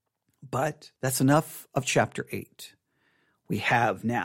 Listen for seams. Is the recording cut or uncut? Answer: cut